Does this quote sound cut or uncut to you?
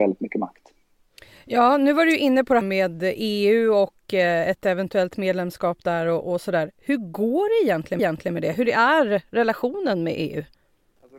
cut